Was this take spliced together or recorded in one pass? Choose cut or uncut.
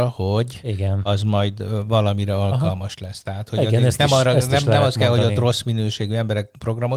uncut